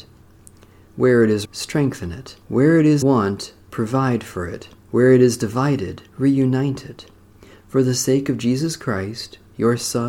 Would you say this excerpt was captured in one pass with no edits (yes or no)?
no